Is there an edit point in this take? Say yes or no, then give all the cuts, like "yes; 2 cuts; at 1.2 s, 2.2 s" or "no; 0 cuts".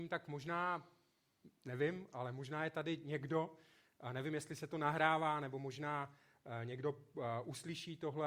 no; 0 cuts